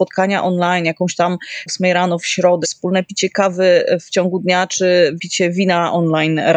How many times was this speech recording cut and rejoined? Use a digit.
3